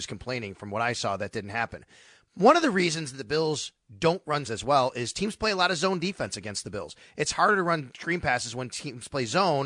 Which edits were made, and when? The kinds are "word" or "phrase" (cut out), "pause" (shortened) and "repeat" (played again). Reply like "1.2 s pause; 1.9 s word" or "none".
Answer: 4.4 s phrase